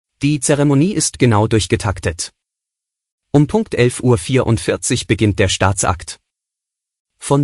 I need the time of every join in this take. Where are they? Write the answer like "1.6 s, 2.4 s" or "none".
none